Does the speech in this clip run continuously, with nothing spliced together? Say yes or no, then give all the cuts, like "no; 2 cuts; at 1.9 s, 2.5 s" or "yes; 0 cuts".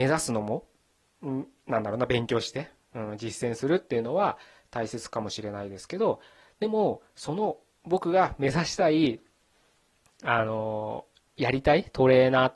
yes; 0 cuts